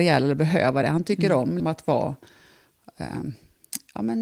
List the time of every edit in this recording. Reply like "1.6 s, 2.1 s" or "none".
1.6 s

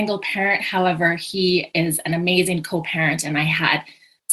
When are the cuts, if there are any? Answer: none

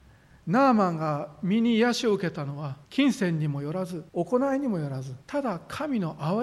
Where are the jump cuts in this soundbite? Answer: 2.8 s, 4.1 s, 5.2 s

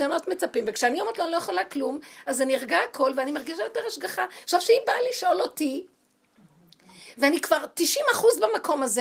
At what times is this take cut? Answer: none

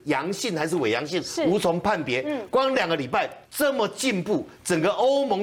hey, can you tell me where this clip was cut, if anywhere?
3.4 s

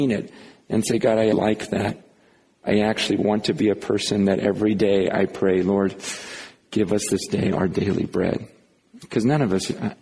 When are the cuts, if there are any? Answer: 1.3 s

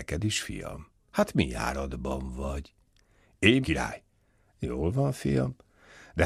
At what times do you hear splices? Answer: 3.6 s

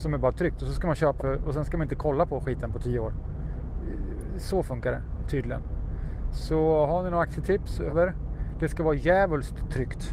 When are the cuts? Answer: 1.2 s, 7.9 s

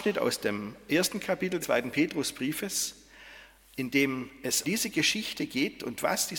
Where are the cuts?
1.6 s, 4.6 s

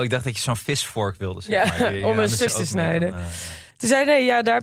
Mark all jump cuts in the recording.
2.5 s, 3.7 s

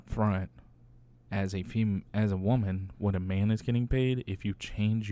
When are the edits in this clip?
none

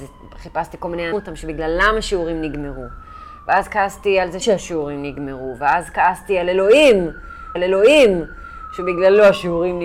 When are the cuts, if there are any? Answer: 1.1 s, 4.4 s, 7.6 s

